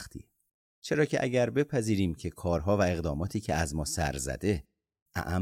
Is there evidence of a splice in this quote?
no; 0 cuts

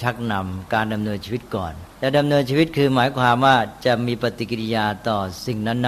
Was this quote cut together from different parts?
yes; 1 cut; at 1.9 s

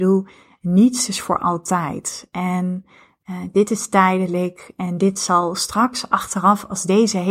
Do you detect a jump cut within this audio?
no; 0 cuts

